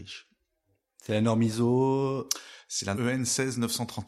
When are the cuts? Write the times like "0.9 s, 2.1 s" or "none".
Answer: 2.9 s